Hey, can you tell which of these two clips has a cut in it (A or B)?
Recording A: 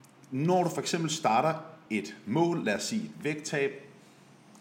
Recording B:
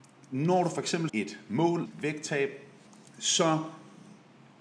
B